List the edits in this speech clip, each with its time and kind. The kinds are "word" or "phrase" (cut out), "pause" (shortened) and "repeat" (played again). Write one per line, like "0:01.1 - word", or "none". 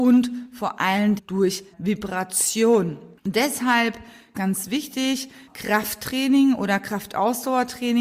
0:01.2 - word
0:01.7 - pause
0:04.3 - word
0:05.5 - phrase